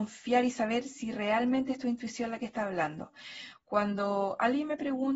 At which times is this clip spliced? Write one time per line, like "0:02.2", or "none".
none

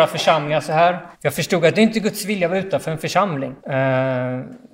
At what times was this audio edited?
0:01.1
0:03.6

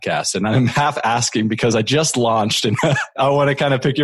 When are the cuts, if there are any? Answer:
none

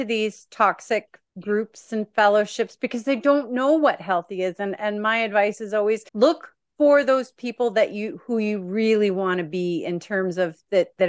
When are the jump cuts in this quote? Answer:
0:01.3
0:06.1

